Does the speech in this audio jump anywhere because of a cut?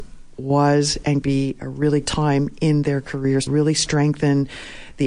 yes; 3 cuts; at 1.2 s, 2.0 s, 3.5 s

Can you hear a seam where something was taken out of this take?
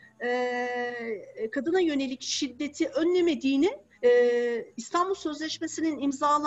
yes; 1 cut; at 3.9 s

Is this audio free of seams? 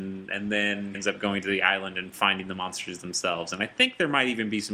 no; 1 cut; at 0.9 s

